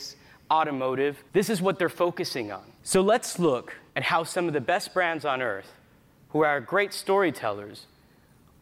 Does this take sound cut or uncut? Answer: cut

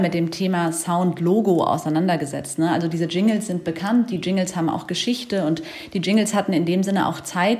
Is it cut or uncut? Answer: uncut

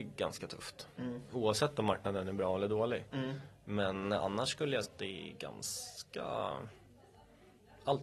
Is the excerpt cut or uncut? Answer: cut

